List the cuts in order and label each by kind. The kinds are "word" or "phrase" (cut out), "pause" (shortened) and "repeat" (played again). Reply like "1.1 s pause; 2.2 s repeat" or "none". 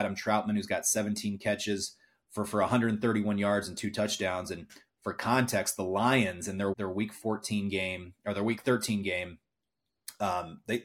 6.7 s word